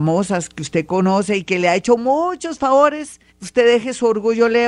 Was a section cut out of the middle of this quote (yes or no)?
yes